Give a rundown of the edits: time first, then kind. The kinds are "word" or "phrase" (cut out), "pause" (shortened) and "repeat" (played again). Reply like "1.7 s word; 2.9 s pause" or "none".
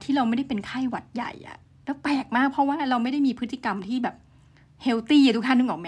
none